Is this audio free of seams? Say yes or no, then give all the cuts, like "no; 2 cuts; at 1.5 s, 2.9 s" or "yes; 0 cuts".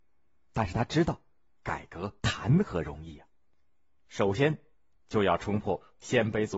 no; 1 cut; at 2.2 s